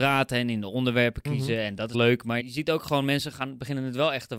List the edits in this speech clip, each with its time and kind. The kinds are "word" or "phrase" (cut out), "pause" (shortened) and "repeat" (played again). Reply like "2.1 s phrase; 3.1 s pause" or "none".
1.9 s word; 2.4 s word; 3.3 s word